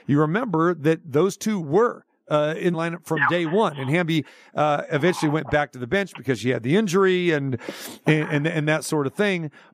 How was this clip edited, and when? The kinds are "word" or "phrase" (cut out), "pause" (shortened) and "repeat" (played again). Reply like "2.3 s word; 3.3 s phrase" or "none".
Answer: 2.7 s phrase